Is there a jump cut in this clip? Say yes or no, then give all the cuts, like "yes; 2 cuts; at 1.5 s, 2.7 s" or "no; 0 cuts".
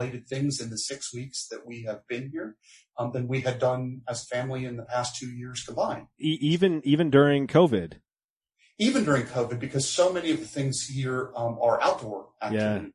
no; 0 cuts